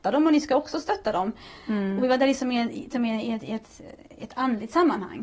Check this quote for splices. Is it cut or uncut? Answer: uncut